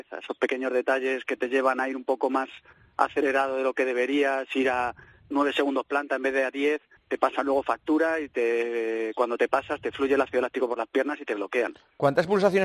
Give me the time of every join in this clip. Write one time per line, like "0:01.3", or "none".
0:07.0